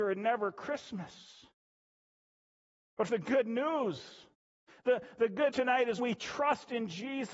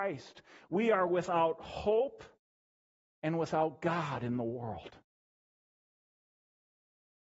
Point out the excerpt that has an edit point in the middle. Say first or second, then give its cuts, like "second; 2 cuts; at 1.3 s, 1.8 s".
first; 3 cuts; at 3.1 s, 5.5 s, 6.0 s